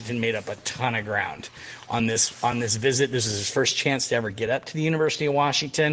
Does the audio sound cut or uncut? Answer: uncut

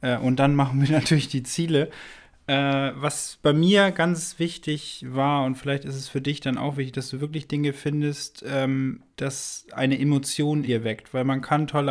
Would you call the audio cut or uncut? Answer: cut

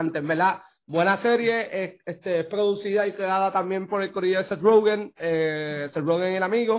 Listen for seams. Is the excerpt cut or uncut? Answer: uncut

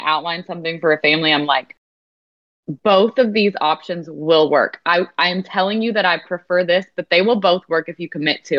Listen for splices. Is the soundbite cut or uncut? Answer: uncut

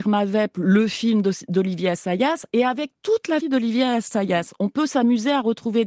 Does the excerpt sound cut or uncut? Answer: cut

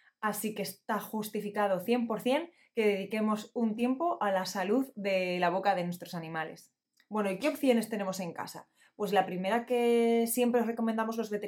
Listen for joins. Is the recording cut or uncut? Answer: uncut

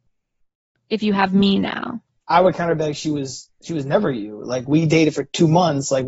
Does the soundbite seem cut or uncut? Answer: uncut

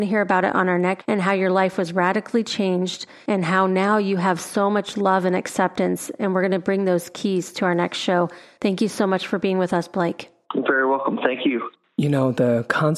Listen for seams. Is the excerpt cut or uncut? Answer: cut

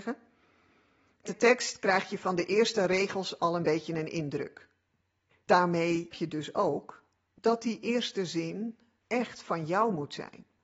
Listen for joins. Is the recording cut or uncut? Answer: cut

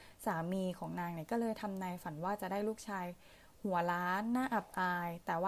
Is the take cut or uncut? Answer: uncut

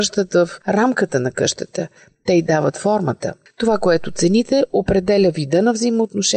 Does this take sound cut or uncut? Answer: uncut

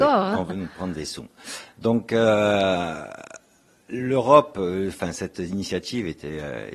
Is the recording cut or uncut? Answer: uncut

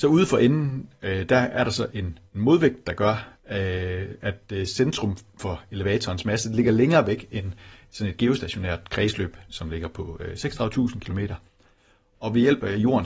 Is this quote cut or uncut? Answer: uncut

